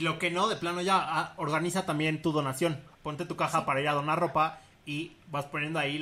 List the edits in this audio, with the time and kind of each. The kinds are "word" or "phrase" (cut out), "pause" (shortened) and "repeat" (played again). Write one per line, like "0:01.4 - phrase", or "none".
0:02.9 - pause